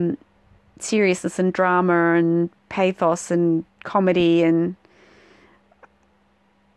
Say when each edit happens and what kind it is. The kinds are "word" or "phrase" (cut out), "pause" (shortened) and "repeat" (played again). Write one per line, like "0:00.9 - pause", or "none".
0:03.7 - pause